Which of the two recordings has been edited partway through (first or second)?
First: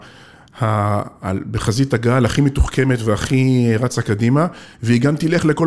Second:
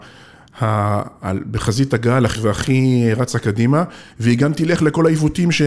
second